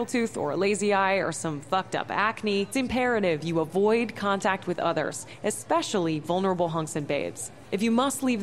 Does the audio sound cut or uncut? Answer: cut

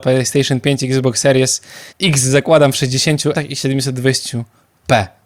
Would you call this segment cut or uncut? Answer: cut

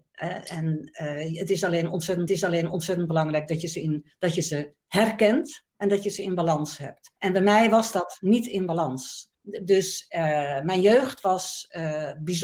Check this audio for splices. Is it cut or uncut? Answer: cut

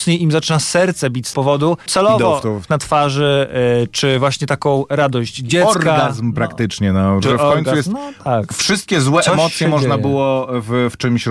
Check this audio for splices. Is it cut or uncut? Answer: cut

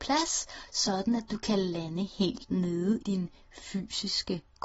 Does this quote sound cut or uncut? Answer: cut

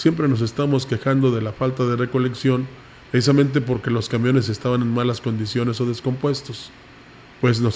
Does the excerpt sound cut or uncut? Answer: uncut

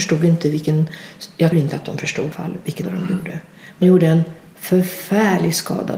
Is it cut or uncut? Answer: cut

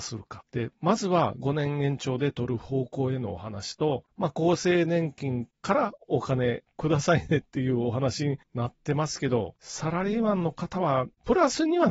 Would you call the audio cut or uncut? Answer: uncut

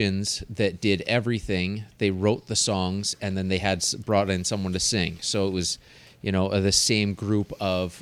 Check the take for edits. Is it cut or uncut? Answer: uncut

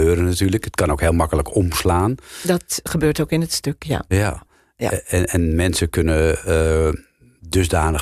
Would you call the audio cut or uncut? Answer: uncut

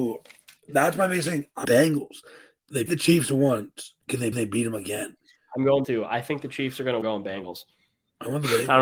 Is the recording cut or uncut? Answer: cut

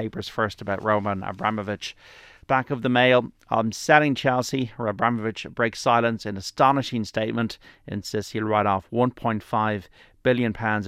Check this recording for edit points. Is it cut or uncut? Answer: uncut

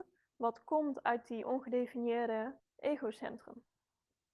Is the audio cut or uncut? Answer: cut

